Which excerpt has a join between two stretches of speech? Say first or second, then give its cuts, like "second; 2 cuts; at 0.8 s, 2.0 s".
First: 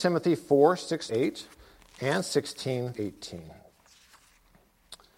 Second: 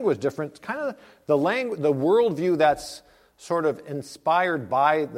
first; 2 cuts; at 1.1 s, 2.9 s